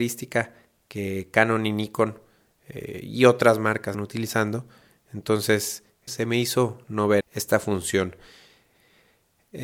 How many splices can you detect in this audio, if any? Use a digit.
4